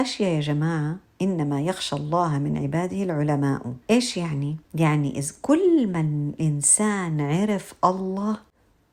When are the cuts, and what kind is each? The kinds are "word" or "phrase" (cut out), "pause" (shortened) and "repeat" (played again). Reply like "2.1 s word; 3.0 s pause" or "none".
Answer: 3.8 s pause; 4.6 s pause